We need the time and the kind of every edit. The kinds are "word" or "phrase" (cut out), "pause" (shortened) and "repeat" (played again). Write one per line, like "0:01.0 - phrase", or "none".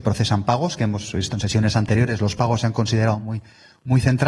none